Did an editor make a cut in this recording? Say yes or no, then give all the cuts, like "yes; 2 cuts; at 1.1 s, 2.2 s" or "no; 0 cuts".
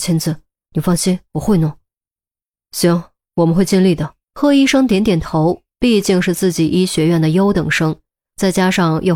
yes; 2 cuts; at 4.2 s, 5.7 s